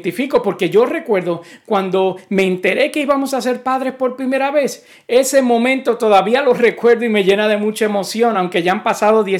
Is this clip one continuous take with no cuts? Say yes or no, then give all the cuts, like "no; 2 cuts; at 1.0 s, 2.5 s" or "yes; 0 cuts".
yes; 0 cuts